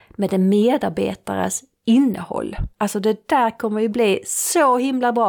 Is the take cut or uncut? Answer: cut